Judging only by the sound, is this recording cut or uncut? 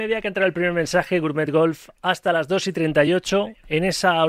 uncut